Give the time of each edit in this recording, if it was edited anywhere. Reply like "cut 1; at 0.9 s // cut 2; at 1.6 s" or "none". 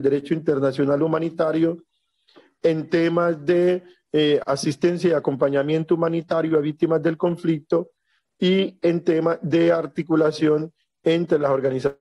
none